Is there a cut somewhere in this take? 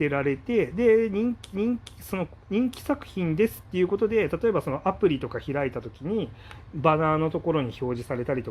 yes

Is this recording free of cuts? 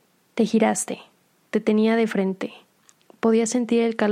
yes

